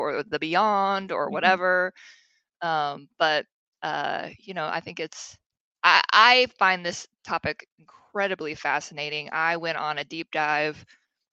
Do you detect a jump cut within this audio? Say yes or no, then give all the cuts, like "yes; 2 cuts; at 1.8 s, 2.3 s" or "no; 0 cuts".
no; 0 cuts